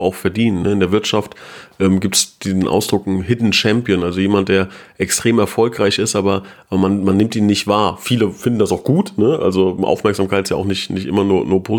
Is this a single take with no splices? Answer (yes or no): no